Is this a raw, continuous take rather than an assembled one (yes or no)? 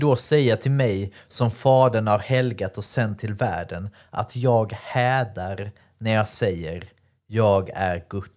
yes